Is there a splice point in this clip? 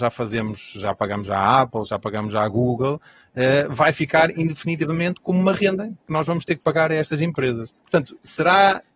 yes; 1 cut; at 7.8 s

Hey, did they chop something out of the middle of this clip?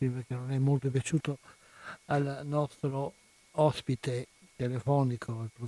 no; 0 cuts

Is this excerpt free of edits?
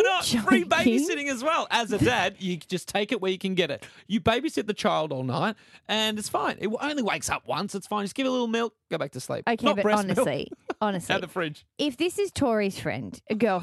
yes; 0 cuts

